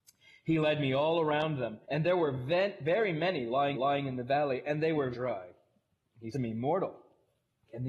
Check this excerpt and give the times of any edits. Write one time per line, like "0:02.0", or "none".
0:01.8
0:03.7
0:05.1
0:06.3